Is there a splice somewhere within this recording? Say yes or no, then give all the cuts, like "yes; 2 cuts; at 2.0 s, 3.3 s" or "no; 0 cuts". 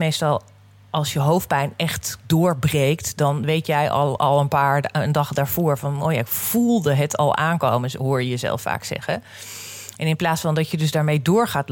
no; 0 cuts